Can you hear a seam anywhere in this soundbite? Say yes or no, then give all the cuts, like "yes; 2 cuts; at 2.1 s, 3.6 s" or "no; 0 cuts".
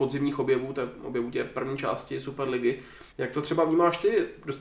yes; 1 cut; at 3.1 s